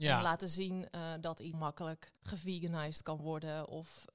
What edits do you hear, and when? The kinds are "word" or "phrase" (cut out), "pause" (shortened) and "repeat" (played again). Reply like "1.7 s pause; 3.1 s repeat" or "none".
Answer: 1.5 s word; 2.2 s pause